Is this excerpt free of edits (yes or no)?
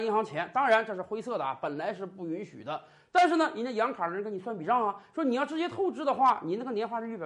yes